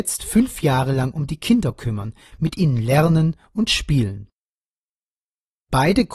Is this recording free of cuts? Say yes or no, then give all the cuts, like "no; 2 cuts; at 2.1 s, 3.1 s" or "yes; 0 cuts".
yes; 0 cuts